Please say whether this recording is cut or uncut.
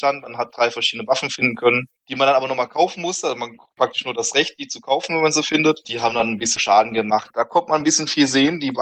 cut